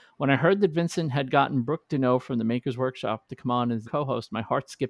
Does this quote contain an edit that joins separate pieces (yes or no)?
yes